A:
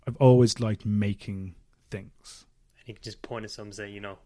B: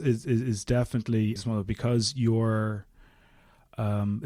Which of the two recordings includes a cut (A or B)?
B